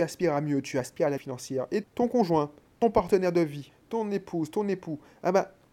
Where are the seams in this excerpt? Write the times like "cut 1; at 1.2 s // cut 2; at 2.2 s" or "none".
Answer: cut 1; at 1.2 s // cut 2; at 1.8 s // cut 3; at 3.8 s